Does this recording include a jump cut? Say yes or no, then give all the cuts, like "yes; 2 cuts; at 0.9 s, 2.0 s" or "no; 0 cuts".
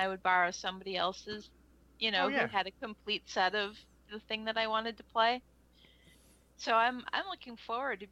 no; 0 cuts